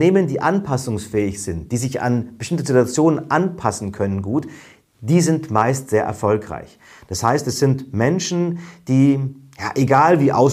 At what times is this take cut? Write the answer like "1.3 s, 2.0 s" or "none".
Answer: none